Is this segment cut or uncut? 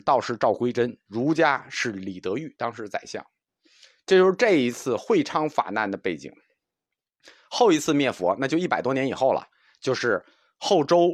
uncut